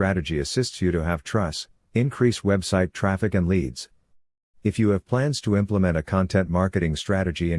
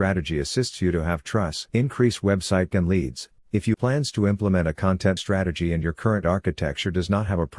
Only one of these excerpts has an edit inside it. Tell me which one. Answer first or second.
second